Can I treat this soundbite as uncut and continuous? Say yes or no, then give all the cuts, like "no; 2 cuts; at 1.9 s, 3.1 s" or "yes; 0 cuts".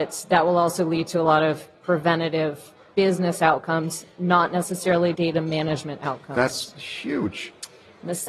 no; 1 cut; at 5.1 s